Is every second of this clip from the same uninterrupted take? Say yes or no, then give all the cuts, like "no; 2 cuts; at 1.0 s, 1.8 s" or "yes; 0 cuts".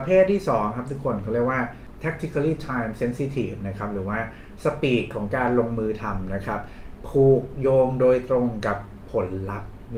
yes; 0 cuts